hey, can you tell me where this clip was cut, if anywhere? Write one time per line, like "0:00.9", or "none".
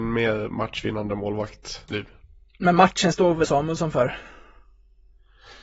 0:01.9
0:03.1
0:03.4